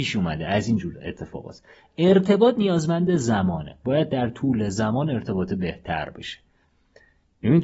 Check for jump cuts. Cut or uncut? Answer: uncut